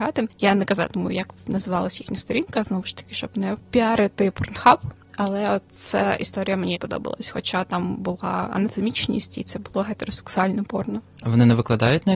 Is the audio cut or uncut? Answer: cut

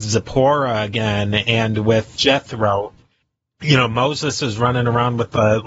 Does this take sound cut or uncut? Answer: uncut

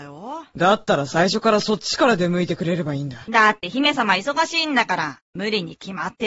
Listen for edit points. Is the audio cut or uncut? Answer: uncut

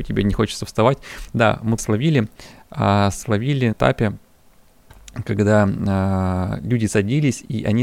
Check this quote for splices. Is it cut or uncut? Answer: cut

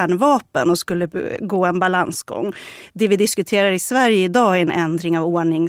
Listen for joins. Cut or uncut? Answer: uncut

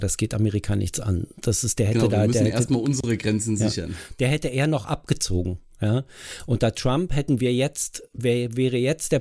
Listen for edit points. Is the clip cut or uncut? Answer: uncut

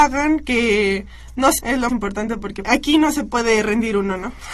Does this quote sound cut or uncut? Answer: cut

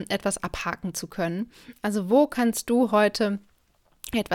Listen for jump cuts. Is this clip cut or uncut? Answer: uncut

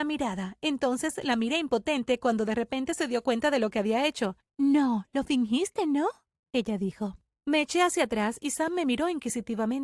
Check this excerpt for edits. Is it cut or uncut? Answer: uncut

